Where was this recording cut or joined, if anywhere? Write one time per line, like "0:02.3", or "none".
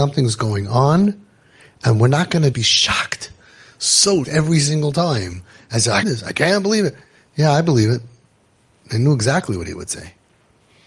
0:02.5
0:04.2
0:06.0

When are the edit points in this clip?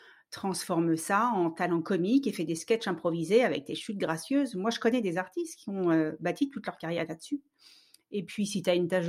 none

